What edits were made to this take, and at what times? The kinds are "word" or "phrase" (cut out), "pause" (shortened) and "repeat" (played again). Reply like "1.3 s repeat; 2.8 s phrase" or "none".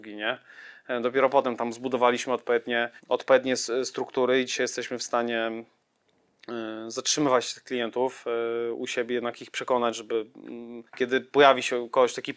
3.0 s pause; 10.9 s pause